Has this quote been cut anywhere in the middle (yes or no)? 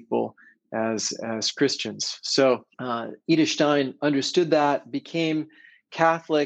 yes